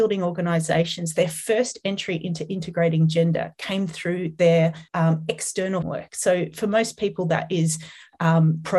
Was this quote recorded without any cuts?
no; 2 cuts; at 4.9 s, 5.8 s

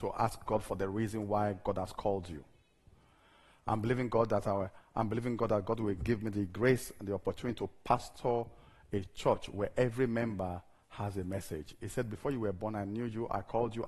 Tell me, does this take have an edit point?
no; 0 cuts

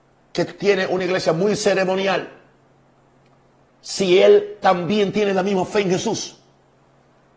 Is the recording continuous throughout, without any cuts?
yes; 0 cuts

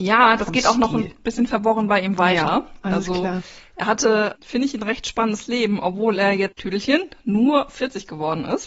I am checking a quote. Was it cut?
no; 0 cuts

